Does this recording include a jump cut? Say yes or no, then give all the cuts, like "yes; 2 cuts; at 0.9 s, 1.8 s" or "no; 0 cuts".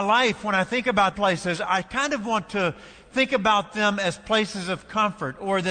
yes; 1 cut; at 1.1 s